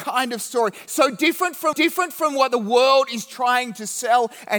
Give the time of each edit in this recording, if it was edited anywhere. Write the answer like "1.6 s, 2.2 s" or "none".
1.7 s